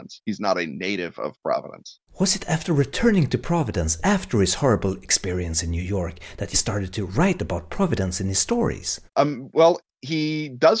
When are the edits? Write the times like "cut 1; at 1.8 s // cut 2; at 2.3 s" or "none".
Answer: cut 1; at 2.1 s // cut 2; at 6.5 s // cut 3; at 9.1 s